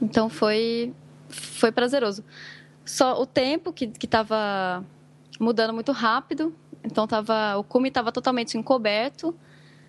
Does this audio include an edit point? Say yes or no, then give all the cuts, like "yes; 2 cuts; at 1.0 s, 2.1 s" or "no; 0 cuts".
no; 0 cuts